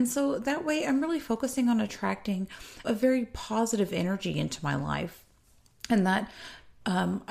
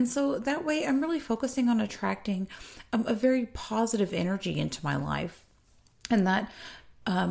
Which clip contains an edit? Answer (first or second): first